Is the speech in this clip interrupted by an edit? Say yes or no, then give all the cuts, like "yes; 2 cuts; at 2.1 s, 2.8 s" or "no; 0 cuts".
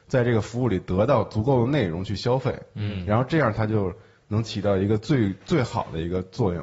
no; 0 cuts